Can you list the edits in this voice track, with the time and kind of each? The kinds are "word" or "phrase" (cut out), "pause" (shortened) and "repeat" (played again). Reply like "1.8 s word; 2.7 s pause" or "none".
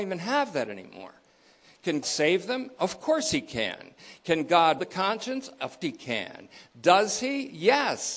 2.0 s word; 4.8 s word; 5.8 s word